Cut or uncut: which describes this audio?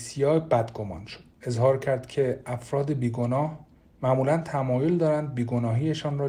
cut